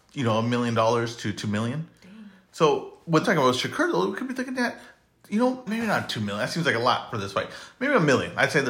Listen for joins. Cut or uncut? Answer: cut